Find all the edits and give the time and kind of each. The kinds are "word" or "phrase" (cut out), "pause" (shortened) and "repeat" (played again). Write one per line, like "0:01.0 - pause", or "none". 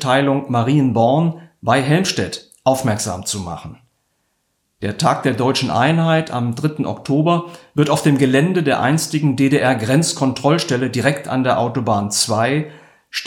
none